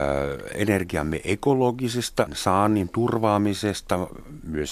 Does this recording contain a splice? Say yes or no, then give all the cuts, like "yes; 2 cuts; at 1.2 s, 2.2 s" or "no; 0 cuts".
yes; 1 cut; at 2.3 s